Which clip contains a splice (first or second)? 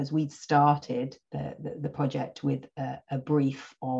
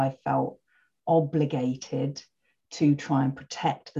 first